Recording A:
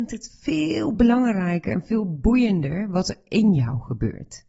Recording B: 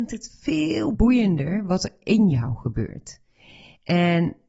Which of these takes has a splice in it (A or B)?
B